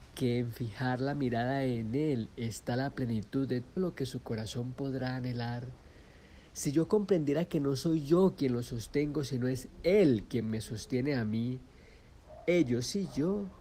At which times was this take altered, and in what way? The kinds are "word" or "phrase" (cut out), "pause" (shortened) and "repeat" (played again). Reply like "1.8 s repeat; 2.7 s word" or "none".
3.8 s word